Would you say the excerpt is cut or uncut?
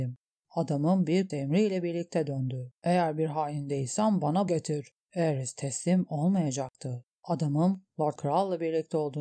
cut